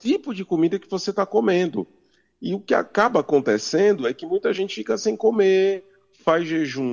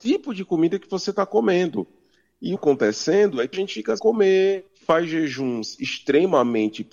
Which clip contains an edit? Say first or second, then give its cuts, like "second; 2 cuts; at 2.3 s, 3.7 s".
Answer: second; 4 cuts; at 2.6 s, 3.5 s, 4.0 s, 4.7 s